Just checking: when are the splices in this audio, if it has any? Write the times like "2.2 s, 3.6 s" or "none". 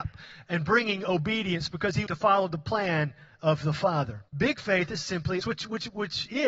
2.1 s, 4.3 s, 5.4 s